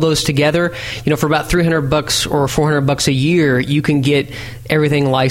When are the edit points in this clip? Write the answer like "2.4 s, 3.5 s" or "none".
none